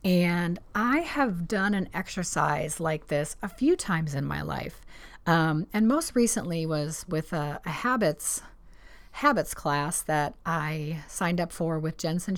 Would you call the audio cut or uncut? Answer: uncut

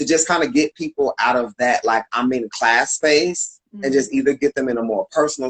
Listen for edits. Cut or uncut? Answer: cut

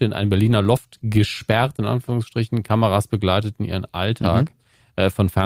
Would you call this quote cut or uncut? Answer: uncut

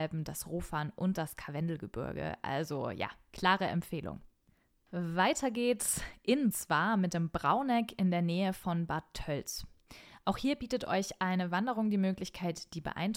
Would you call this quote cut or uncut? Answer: cut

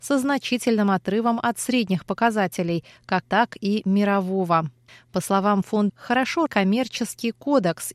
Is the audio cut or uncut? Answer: cut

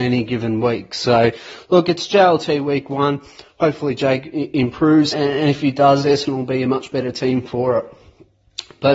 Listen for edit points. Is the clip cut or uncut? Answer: cut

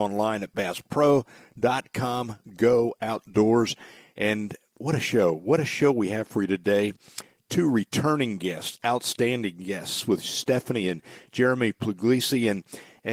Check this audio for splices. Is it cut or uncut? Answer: uncut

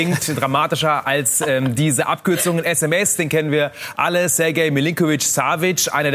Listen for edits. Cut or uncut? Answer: uncut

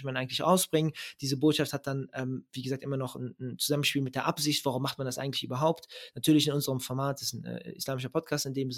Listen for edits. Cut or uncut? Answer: uncut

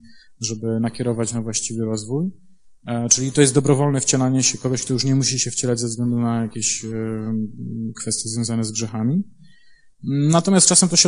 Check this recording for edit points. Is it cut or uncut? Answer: uncut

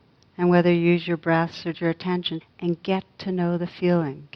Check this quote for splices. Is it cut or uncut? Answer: cut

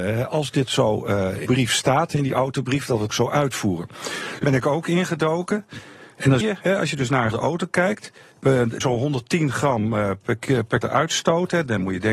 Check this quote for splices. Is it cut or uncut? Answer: cut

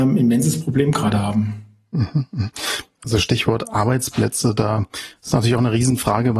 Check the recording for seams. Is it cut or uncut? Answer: uncut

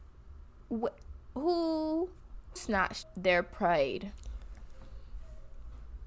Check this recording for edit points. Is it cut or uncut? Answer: cut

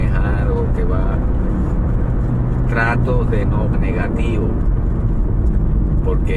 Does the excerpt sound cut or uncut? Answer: cut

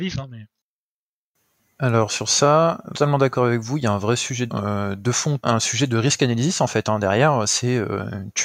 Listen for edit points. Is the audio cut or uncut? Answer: cut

